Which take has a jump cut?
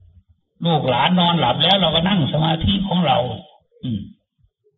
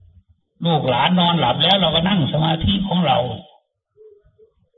first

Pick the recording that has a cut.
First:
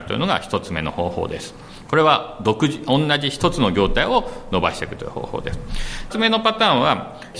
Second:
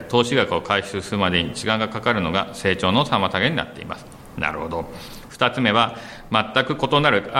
first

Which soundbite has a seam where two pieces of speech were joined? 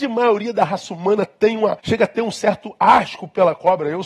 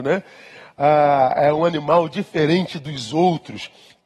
first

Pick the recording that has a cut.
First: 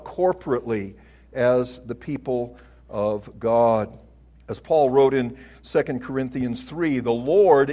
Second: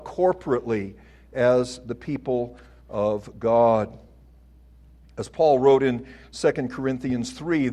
first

